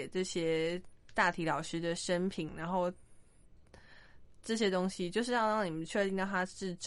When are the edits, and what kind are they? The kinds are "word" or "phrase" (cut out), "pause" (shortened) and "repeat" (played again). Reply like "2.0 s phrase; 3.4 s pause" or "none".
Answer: 2.5 s phrase